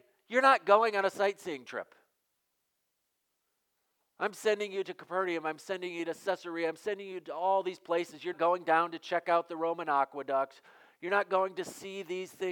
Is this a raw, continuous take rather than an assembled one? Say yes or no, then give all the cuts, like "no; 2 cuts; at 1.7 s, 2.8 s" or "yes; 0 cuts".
no; 1 cut; at 8.3 s